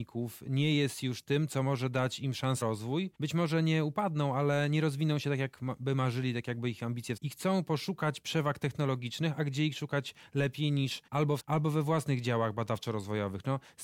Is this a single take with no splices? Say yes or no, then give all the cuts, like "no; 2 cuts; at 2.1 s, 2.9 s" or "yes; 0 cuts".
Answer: no; 5 cuts; at 2.6 s, 3.1 s, 7.2 s, 11.1 s, 11.4 s